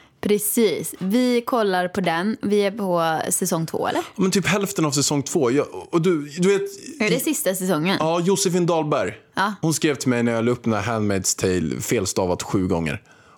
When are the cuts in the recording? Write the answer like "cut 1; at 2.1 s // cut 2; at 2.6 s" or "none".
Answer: none